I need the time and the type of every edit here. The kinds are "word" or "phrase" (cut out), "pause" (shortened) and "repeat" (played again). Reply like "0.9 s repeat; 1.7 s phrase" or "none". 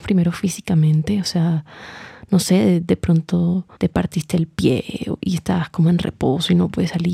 3.8 s pause